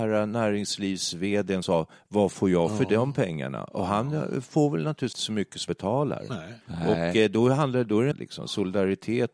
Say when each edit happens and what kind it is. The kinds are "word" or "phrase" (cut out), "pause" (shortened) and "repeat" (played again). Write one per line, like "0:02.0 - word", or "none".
0:01.6 - word
0:05.1 - word
0:05.7 - word
0:06.6 - pause
0:08.1 - phrase